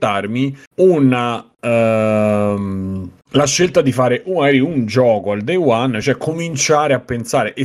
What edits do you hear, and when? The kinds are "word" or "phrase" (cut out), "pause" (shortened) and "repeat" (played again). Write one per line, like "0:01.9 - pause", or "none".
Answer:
none